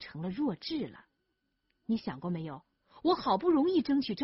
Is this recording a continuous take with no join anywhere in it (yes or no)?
yes